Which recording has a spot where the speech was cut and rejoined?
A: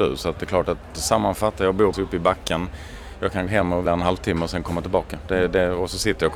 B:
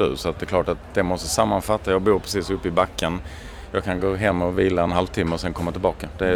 A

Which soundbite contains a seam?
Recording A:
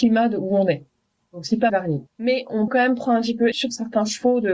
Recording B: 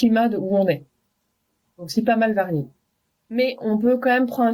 A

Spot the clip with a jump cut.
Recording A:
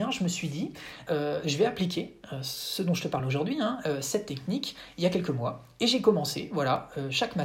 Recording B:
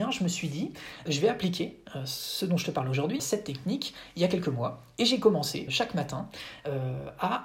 B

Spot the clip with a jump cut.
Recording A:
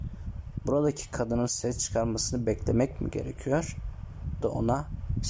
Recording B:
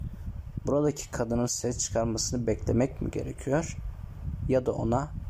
A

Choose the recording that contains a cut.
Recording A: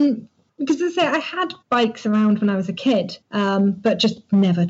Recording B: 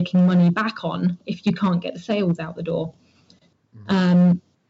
A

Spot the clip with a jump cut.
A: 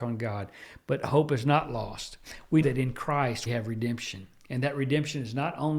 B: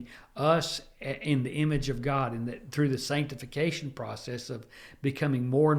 A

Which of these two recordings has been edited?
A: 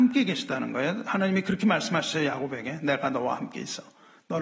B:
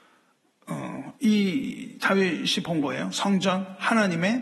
B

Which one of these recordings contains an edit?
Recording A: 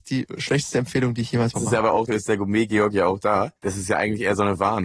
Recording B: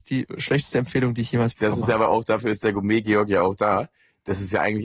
A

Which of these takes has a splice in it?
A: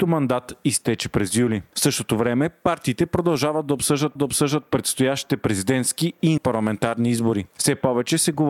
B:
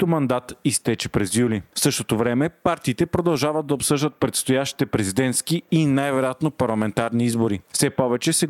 A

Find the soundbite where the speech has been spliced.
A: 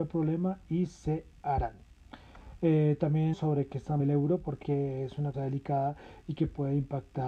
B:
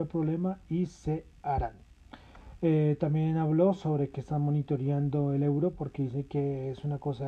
A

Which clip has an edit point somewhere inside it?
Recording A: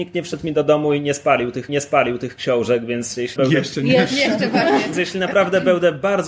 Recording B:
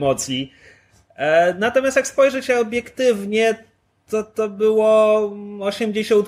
A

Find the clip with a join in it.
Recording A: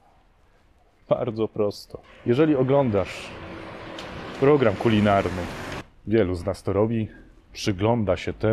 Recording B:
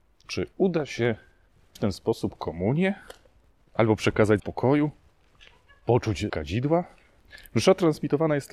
B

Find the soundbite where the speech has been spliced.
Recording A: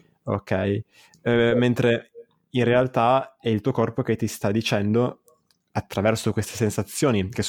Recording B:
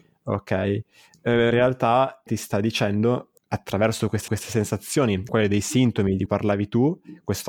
B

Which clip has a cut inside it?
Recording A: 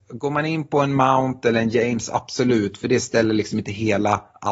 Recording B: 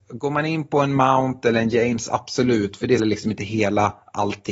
B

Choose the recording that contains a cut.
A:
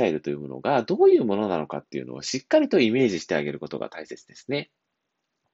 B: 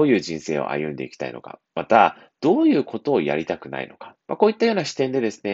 B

